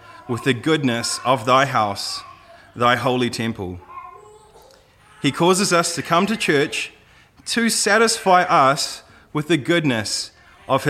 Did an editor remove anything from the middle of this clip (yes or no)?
no